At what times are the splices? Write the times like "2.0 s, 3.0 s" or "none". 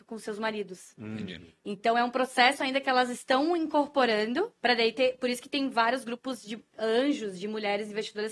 4.6 s

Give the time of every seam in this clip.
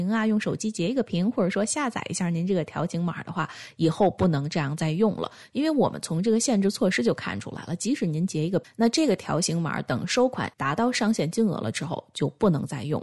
10.5 s

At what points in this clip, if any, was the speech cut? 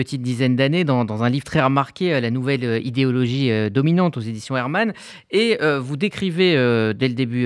none

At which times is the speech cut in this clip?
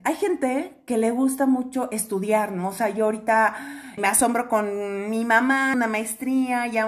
4.0 s, 5.7 s

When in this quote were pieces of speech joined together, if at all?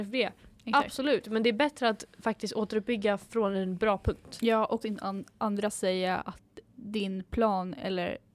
4.8 s, 6.7 s

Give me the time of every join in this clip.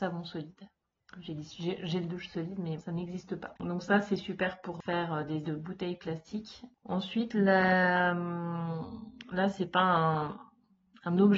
2.8 s, 5.4 s

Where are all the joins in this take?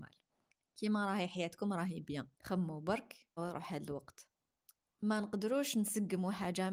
2.3 s, 3.4 s

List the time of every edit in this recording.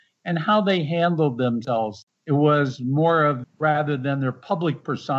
3.4 s

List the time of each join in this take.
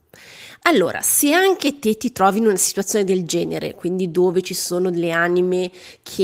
none

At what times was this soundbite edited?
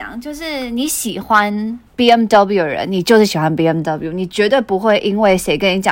1.9 s

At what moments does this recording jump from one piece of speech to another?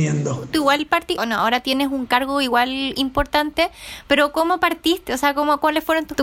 1.2 s

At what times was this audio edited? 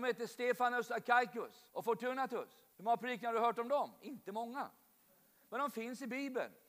1.7 s, 2.7 s

